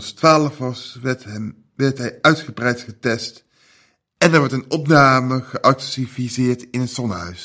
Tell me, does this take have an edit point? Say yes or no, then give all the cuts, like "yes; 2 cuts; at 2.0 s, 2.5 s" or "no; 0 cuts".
no; 0 cuts